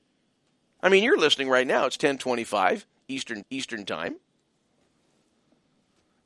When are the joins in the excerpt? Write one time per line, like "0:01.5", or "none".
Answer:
0:03.4